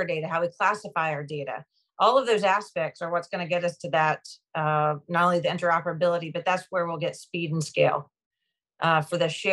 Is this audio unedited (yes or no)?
yes